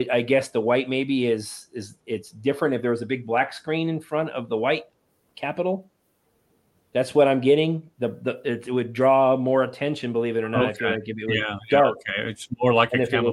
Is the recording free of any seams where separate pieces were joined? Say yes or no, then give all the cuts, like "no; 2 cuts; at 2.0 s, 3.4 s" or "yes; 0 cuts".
yes; 0 cuts